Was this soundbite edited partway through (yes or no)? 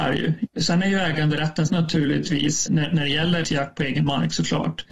yes